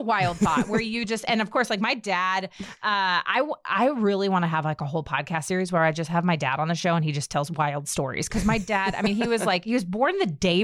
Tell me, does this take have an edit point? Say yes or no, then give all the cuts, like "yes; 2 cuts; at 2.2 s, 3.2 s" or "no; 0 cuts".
no; 0 cuts